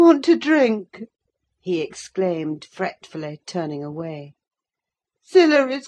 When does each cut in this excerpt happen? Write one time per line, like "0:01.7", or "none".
none